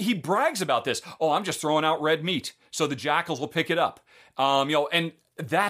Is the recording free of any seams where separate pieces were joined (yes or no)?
yes